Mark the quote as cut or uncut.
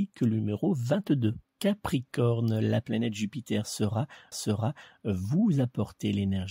cut